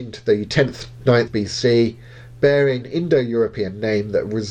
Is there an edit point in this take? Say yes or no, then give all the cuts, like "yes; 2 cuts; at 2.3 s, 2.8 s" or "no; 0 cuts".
yes; 2 cuts; at 1.3 s, 2.8 s